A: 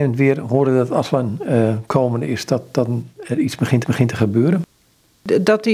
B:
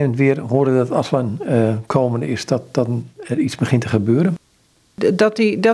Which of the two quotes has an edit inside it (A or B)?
A